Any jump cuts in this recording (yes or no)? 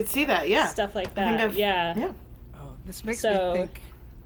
no